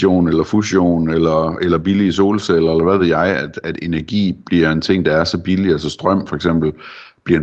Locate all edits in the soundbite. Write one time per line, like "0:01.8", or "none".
none